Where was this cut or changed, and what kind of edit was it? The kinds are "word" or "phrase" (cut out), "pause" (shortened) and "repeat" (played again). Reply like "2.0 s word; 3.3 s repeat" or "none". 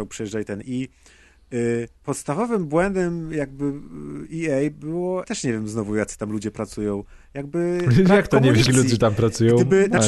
5.2 s word; 8.7 s word

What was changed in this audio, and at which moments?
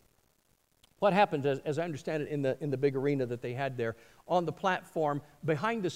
none

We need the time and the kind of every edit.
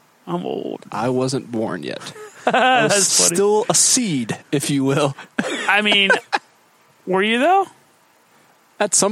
3.1 s word

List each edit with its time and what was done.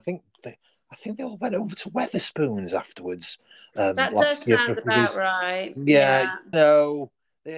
6.5 s word

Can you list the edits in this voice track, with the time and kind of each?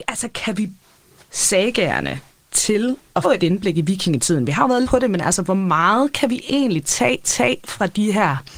1.2 s word; 2.3 s pause; 3.2 s word; 4.8 s phrase; 7.2 s repeat

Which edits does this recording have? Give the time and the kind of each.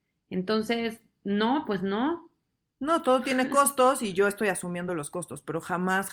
none

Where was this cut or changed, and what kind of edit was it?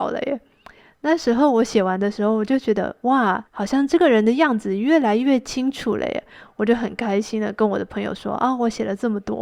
3.5 s pause

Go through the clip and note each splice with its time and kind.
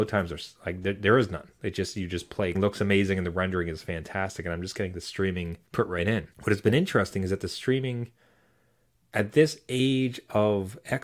2.5 s phrase; 5.7 s pause; 6.3 s pause

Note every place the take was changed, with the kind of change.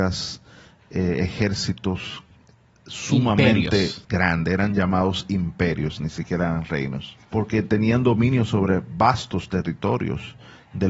4.0 s pause; 7.2 s pause

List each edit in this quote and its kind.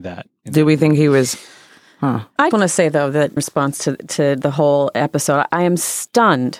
2.5 s word; 3.4 s word

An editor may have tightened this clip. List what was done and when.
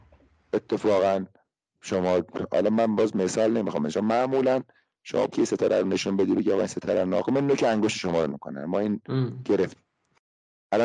5.3 s word; 8.3 s word

